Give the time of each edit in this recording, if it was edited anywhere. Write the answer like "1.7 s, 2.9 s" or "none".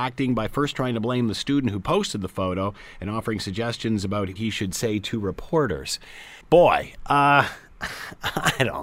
4.4 s, 6.4 s